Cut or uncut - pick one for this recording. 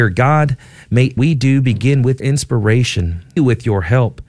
cut